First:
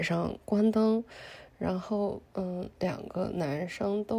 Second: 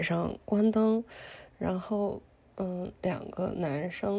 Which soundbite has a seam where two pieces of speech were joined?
first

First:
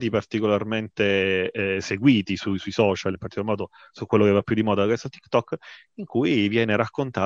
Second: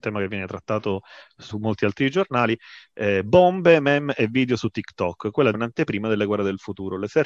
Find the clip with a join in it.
second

